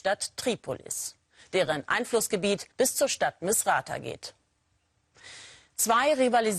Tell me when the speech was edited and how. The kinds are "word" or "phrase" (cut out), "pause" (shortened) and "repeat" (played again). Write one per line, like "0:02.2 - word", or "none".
0:02.7 - pause